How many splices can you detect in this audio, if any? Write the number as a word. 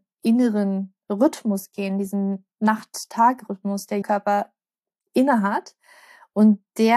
two